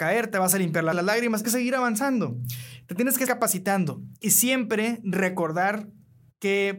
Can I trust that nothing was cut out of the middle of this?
no; 3 cuts; at 0.9 s, 1.4 s, 3.3 s

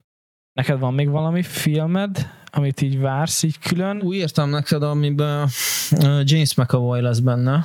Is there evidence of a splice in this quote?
no; 0 cuts

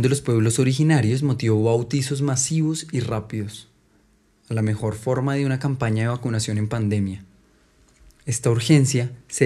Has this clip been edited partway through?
no; 0 cuts

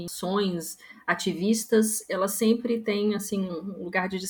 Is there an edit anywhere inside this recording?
no; 0 cuts

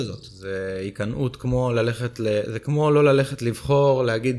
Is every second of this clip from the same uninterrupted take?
yes; 0 cuts

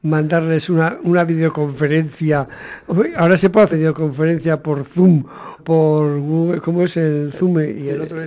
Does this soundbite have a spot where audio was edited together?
yes; 2 cuts; at 3.7 s, 5.6 s

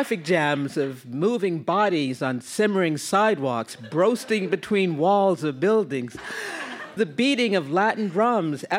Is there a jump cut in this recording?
yes; 1 cut; at 7.0 s

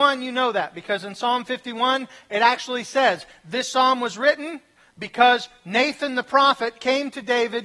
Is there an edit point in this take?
no; 0 cuts

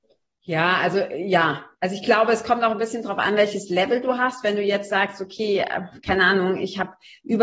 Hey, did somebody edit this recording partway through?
no; 0 cuts

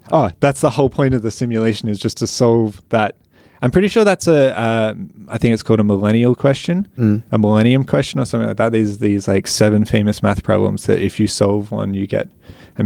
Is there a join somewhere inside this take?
no; 0 cuts

